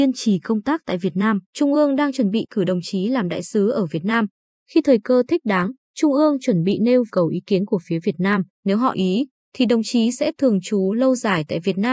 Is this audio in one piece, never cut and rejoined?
no; 4 cuts; at 1.4 s, 7.1 s, 8.5 s, 8.9 s

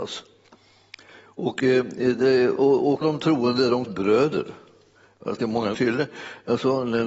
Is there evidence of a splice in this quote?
yes; 5 cuts; at 2.6 s, 3.0 s, 3.8 s, 5.4 s, 5.7 s

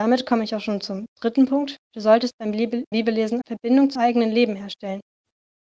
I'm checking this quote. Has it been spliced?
yes; 4 cuts; at 1.8 s, 2.9 s, 3.4 s, 4.0 s

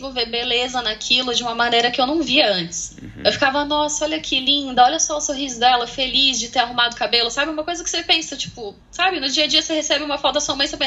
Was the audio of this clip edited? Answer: yes; 1 cut; at 8.8 s

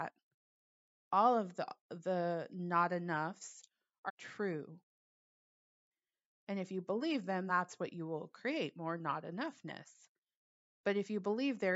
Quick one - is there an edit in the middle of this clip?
yes; 2 cuts; at 4.1 s, 7.5 s

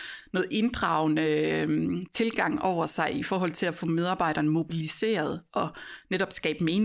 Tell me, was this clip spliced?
no; 0 cuts

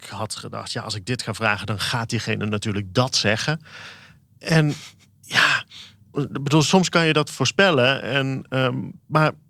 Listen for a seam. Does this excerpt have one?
yes; 1 cut; at 6.1 s

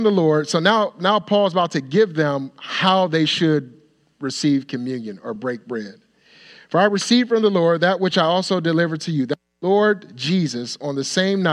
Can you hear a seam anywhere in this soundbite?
no; 0 cuts

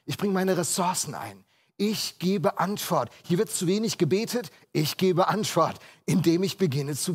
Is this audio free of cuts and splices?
yes; 0 cuts

